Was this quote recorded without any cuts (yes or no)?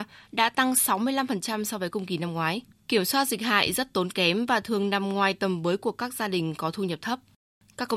yes